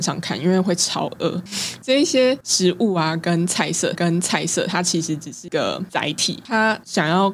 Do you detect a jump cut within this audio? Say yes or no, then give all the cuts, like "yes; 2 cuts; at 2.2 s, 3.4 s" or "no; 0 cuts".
yes; 1 cut; at 3.9 s